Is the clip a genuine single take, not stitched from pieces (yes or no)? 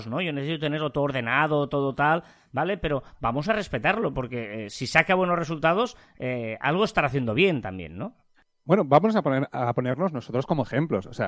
yes